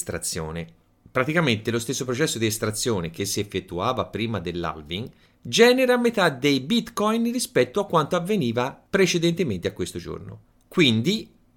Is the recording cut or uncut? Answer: uncut